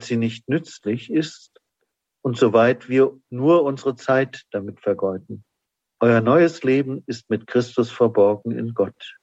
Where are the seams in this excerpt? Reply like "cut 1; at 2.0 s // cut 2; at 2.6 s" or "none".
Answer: none